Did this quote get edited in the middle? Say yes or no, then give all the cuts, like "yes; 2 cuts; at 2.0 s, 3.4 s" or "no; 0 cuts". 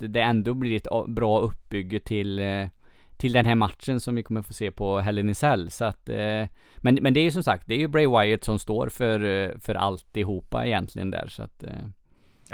no; 0 cuts